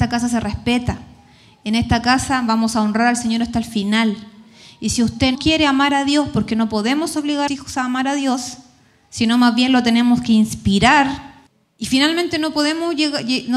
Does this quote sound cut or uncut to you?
cut